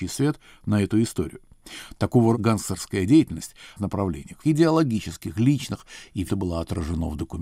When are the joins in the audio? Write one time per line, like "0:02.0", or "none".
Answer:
0:02.3
0:03.8
0:04.4
0:06.3